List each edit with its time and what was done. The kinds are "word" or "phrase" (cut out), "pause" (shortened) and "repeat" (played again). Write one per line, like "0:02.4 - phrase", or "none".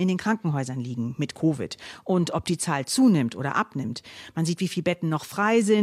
none